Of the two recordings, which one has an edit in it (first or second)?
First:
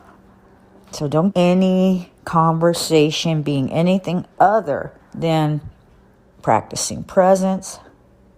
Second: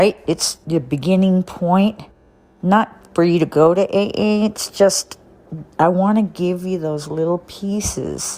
first